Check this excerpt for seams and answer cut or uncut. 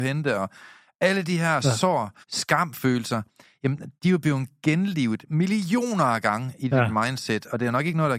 cut